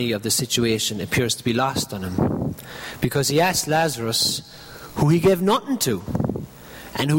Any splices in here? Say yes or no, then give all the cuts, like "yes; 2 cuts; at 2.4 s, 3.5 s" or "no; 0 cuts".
no; 0 cuts